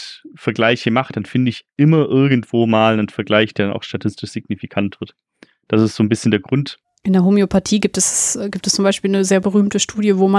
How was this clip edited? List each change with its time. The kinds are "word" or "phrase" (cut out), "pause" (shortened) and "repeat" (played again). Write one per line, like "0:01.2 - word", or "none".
none